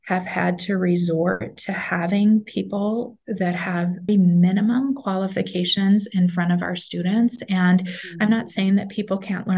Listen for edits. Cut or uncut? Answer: cut